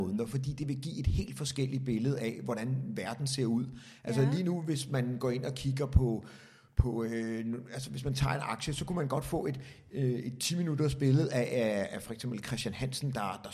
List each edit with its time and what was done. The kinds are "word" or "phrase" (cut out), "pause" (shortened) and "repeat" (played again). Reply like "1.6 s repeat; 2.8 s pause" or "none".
none